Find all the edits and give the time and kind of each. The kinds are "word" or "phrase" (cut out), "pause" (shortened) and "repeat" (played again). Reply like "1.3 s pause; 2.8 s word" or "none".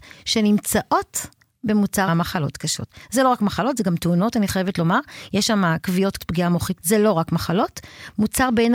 2.1 s word; 6.2 s word; 6.8 s word